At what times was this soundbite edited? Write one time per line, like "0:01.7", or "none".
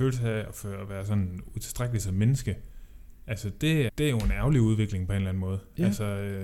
0:03.9